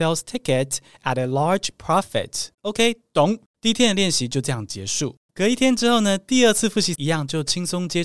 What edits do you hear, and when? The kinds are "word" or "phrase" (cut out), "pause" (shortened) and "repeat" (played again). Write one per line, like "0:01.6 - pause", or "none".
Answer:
0:02.5 - pause
0:03.5 - pause
0:05.2 - pause
0:06.9 - word